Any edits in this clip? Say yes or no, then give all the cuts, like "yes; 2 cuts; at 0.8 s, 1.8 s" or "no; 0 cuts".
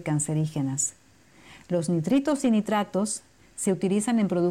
no; 0 cuts